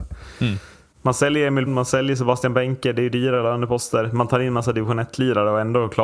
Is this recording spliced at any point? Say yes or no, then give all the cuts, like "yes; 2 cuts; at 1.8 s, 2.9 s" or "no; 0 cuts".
yes; 1 cut; at 1.7 s